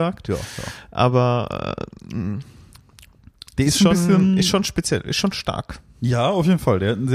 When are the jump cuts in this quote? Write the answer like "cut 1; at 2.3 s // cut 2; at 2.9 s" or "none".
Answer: none